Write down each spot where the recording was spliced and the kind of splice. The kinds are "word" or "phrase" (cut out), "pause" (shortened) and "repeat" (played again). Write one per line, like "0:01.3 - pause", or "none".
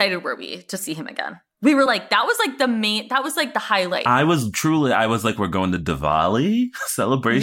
none